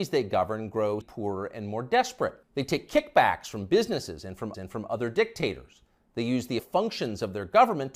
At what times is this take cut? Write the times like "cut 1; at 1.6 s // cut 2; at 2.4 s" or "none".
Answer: cut 1; at 1.0 s // cut 2; at 2.4 s // cut 3; at 4.5 s // cut 4; at 6.6 s